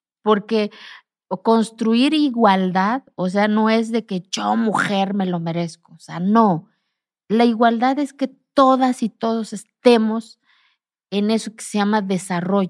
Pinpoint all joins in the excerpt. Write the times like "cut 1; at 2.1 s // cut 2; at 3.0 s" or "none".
none